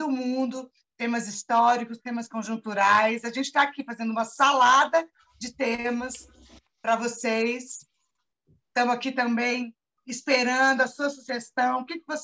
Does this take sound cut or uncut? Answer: uncut